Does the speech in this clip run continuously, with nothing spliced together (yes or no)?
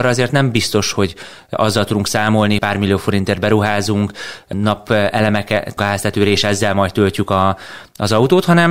no